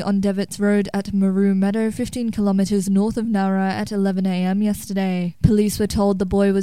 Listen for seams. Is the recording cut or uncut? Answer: uncut